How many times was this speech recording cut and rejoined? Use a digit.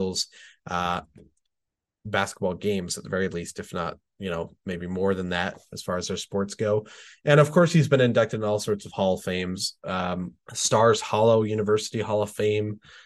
1